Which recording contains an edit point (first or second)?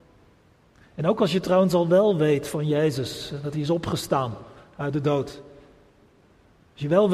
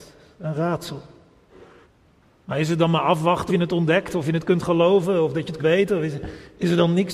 second